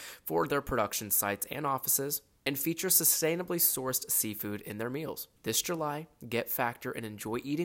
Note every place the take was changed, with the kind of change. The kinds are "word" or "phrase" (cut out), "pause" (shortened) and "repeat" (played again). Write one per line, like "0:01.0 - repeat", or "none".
0:05.4 - pause